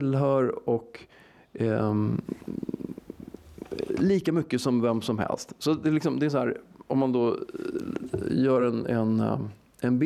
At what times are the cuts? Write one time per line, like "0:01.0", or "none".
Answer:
none